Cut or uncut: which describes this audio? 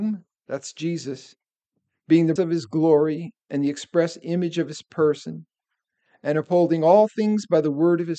cut